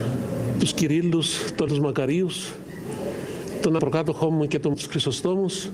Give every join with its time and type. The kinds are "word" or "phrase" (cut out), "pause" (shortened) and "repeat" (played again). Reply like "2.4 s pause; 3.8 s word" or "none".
1.7 s word; 3.8 s word; 4.7 s word

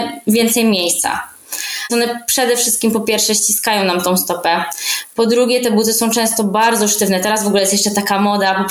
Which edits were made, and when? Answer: 1.9 s word

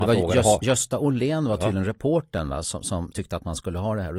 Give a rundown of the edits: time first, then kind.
3.1 s word

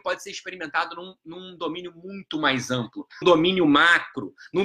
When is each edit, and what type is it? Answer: 3.2 s word

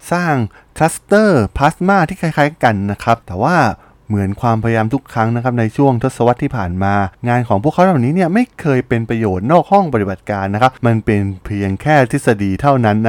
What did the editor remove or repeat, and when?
none

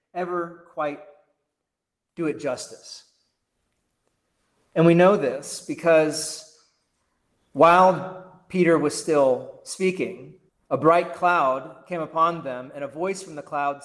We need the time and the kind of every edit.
10.5 s pause

